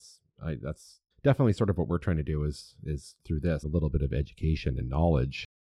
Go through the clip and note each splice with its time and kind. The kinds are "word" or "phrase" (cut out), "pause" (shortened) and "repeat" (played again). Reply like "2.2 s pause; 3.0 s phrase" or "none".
1.1 s pause; 3.2 s pause; 3.6 s phrase